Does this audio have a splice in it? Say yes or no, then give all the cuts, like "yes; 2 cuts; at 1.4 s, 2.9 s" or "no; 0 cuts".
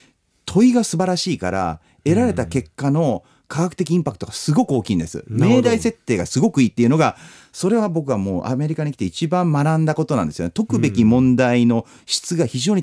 no; 0 cuts